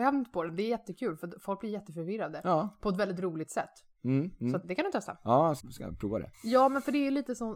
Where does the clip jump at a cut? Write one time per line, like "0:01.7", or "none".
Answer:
0:04.6
0:05.6
0:06.3